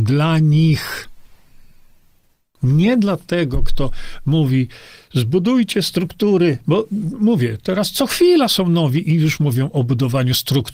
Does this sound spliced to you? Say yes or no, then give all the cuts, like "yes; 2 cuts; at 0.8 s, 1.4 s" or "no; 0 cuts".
no; 0 cuts